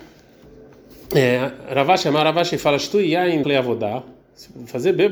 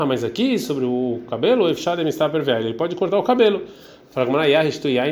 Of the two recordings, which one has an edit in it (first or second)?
first